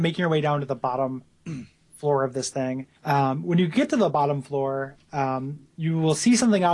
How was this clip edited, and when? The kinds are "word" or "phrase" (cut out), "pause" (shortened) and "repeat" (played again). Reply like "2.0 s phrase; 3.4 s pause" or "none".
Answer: 3.0 s pause